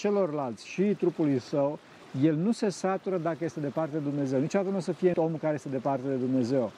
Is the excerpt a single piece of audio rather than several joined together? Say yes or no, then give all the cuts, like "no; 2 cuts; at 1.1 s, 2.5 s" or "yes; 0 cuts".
no; 1 cut; at 5.1 s